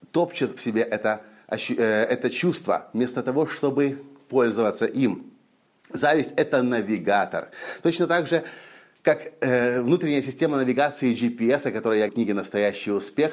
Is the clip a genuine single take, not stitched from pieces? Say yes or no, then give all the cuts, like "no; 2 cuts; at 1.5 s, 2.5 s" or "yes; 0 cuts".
no; 1 cut; at 12.1 s